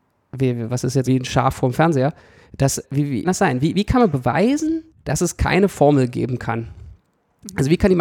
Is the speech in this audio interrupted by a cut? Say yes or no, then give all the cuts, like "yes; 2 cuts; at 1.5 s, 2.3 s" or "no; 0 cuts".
yes; 4 cuts; at 1.1 s, 2.8 s, 3.2 s, 4.9 s